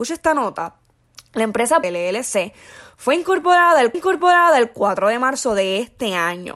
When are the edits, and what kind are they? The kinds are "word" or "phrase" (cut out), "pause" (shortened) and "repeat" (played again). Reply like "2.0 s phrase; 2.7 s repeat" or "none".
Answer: 1.8 s phrase; 3.9 s repeat